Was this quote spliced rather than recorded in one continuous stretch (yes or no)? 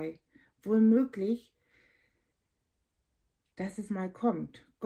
yes